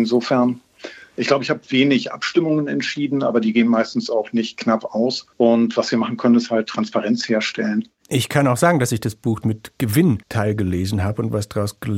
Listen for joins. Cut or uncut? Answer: cut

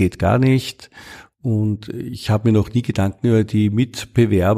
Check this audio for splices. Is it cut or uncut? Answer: uncut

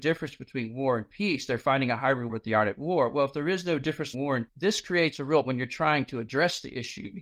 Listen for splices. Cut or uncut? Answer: cut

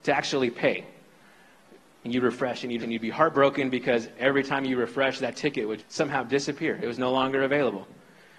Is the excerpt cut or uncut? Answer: cut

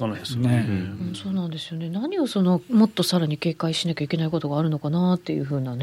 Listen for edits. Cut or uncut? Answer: cut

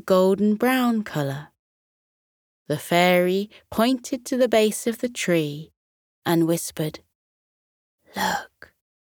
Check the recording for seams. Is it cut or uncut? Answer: uncut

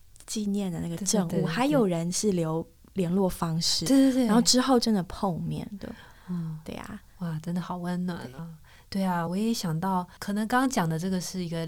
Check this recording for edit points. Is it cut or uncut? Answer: uncut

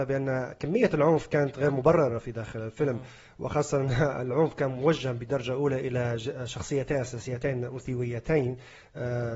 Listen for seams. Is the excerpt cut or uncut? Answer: uncut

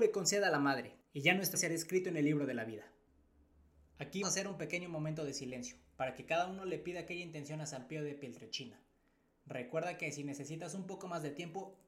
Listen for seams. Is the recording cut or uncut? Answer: cut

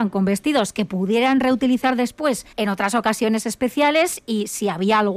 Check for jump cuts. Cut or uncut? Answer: cut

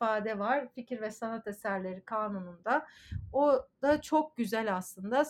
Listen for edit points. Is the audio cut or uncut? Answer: uncut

